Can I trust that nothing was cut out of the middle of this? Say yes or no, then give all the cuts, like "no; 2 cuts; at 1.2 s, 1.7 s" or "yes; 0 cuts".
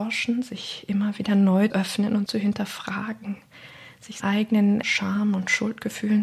no; 4 cuts; at 1.7 s, 2.3 s, 4.2 s, 4.8 s